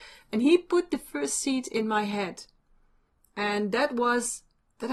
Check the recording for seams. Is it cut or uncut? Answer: uncut